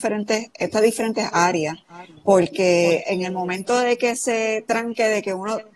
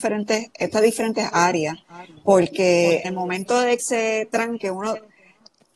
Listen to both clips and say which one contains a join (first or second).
second